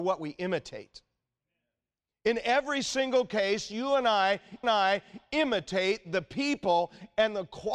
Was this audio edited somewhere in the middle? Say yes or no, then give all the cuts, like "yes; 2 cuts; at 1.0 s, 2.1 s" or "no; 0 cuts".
yes; 1 cut; at 4.6 s